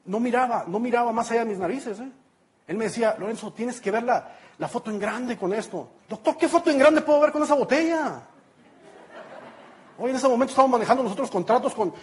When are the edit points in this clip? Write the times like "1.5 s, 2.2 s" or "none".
6.0 s